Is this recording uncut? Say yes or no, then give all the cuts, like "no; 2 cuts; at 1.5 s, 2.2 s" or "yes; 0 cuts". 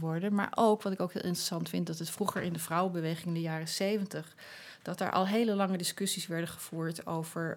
yes; 0 cuts